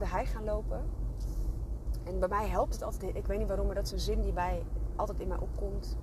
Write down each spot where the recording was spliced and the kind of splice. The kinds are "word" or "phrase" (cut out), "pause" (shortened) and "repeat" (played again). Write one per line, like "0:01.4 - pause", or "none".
none